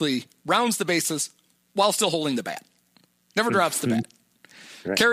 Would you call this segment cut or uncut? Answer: uncut